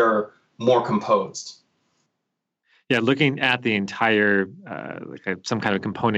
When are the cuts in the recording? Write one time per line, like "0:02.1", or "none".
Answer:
none